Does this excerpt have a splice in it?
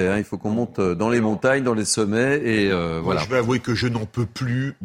no; 0 cuts

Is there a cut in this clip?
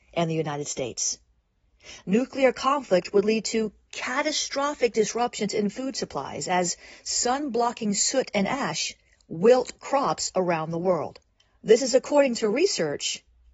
no; 0 cuts

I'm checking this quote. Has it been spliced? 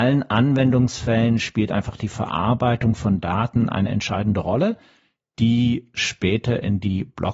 no; 0 cuts

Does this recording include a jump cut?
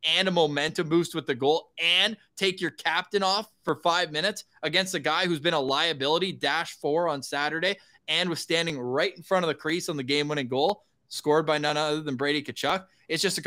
no; 0 cuts

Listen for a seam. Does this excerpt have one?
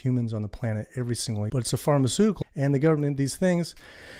yes; 2 cuts; at 1.5 s, 2.4 s

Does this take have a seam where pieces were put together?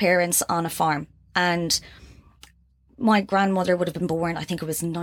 no; 0 cuts

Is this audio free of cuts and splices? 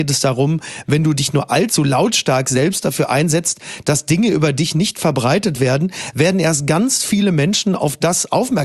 yes; 0 cuts

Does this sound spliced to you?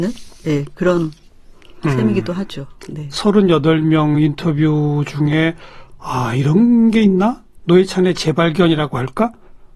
no; 0 cuts

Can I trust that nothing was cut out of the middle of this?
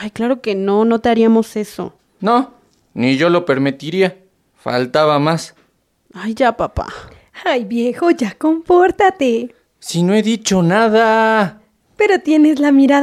yes; 0 cuts

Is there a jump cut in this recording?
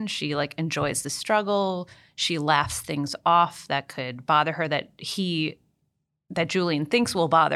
no; 0 cuts

